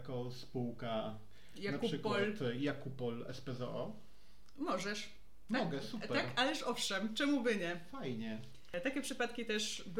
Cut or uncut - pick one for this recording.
uncut